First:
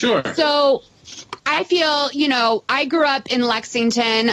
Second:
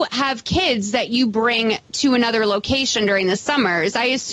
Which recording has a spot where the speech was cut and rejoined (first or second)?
first